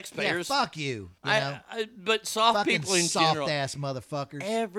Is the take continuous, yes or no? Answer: no